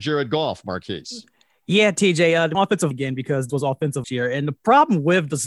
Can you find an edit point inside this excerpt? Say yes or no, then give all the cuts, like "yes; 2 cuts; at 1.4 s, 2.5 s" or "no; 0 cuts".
yes; 4 cuts; at 2.5 s, 2.9 s, 3.5 s, 4.0 s